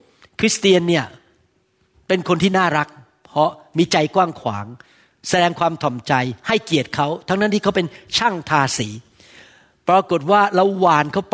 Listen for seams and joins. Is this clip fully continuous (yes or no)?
yes